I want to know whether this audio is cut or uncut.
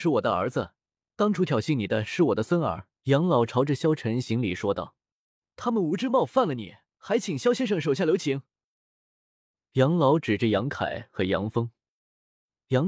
cut